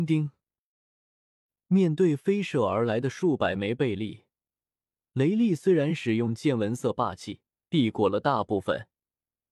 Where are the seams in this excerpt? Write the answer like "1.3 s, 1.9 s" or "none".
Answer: 7.5 s